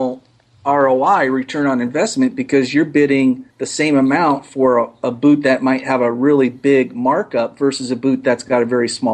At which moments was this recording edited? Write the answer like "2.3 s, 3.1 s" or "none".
3.5 s